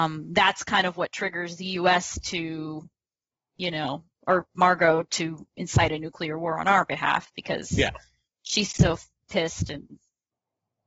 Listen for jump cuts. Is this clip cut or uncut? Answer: uncut